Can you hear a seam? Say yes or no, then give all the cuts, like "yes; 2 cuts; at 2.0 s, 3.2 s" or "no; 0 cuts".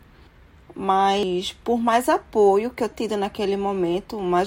yes; 1 cut; at 2.9 s